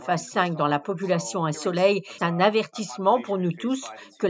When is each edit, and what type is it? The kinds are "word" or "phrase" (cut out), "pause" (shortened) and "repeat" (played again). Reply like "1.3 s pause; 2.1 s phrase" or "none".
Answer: 1.5 s word; 2.2 s word